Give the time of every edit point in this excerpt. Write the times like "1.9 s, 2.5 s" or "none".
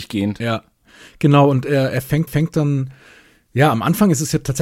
2.3 s

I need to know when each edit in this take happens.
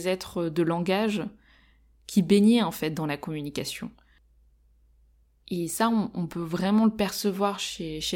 none

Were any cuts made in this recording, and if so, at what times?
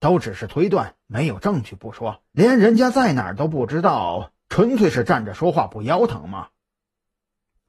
2.3 s

